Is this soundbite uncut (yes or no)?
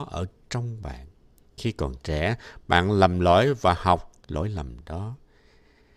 no